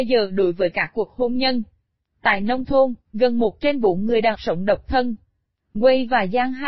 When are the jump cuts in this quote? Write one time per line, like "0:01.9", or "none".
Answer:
0:04.3